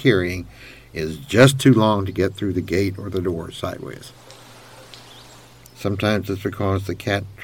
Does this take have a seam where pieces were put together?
no; 0 cuts

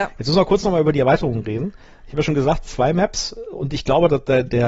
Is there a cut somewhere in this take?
no; 0 cuts

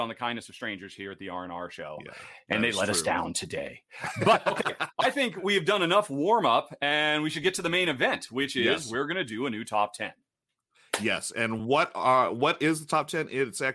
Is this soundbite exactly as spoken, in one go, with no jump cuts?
yes; 0 cuts

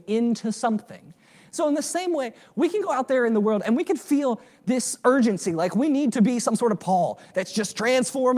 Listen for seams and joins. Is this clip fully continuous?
yes; 0 cuts

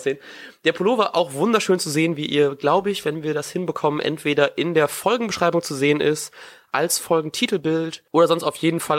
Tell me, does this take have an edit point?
yes; 1 cut; at 8.1 s

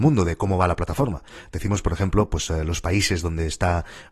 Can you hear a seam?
no; 0 cuts

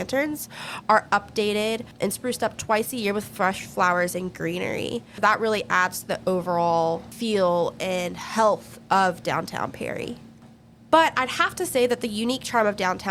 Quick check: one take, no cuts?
yes; 0 cuts

